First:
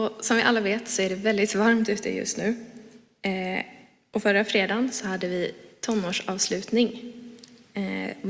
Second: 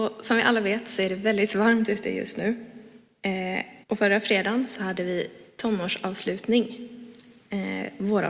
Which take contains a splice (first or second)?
second